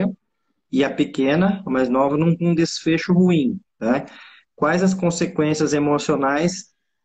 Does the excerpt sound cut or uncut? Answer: cut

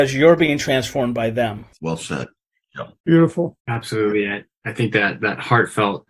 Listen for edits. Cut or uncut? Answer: uncut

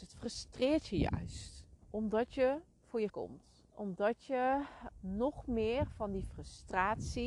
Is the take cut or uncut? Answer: cut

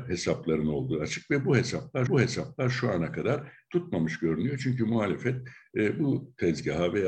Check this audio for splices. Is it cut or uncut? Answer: cut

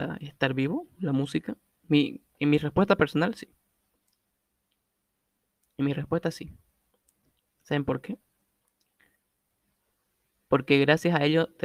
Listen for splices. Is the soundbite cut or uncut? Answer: uncut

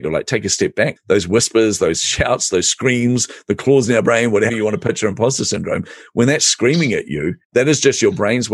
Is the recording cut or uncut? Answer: cut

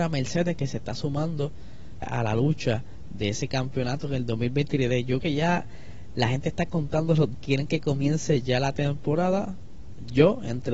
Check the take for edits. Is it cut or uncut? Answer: cut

